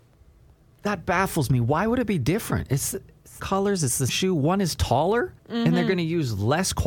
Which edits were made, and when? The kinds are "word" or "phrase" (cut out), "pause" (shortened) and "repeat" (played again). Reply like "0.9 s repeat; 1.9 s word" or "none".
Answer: 3.4 s word; 4.1 s word; 5.4 s pause